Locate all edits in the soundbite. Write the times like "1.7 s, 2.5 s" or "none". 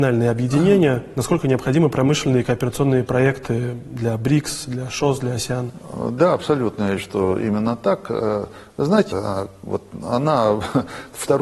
7.0 s, 9.1 s